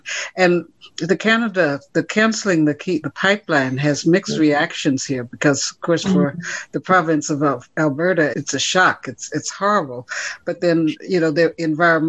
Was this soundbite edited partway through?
yes; 2 cuts; at 3.0 s, 8.3 s

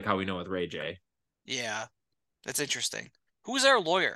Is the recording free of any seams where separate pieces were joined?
yes; 0 cuts

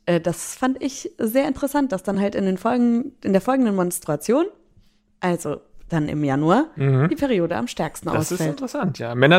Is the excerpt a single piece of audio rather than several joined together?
yes; 0 cuts

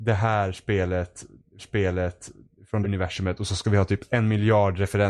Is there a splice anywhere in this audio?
yes; 2 cuts; at 1.6 s, 2.8 s

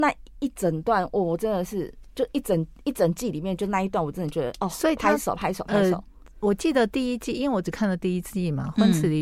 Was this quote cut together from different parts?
no; 0 cuts

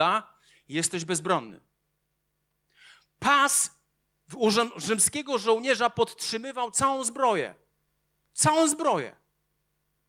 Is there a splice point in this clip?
no; 0 cuts

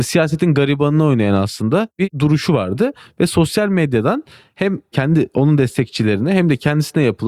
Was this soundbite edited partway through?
no; 0 cuts

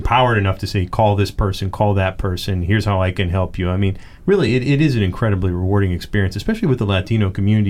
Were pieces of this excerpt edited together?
no; 0 cuts

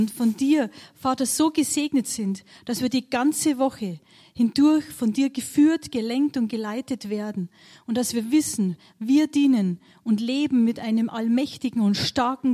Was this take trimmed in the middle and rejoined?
no; 0 cuts

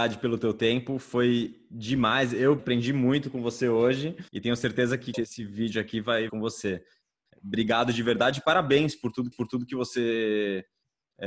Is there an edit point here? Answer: yes; 5 cuts; at 2.6 s, 4.3 s, 5.1 s, 6.3 s, 9.3 s

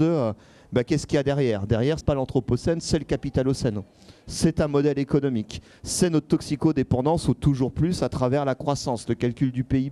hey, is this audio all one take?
no; 1 cut; at 2.0 s

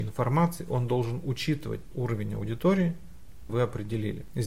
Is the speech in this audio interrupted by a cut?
yes; 2 cuts; at 1.9 s, 3.5 s

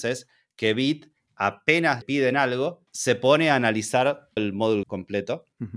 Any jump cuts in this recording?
yes; 4 cuts; at 2.0 s, 2.9 s, 4.4 s, 4.8 s

